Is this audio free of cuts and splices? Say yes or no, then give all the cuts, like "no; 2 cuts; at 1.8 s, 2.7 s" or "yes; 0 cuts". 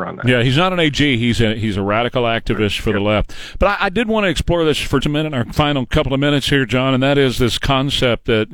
no; 1 cut; at 5.0 s